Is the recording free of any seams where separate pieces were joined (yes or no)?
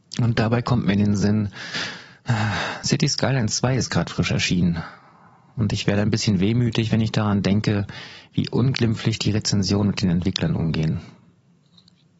yes